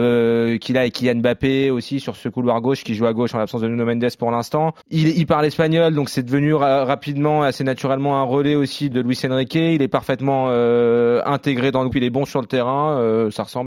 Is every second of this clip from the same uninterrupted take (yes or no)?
no